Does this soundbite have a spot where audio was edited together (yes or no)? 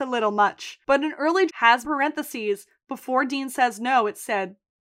yes